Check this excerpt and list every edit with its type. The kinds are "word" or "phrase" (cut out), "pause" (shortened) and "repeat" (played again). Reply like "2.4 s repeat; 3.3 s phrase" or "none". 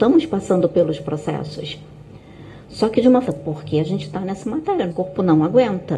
3.2 s phrase; 4.9 s word